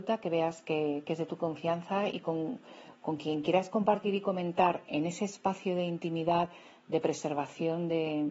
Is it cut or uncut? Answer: uncut